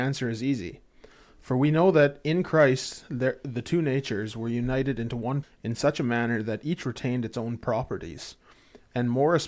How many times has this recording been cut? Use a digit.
1